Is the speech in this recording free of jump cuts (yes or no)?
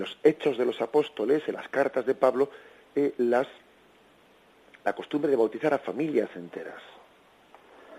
yes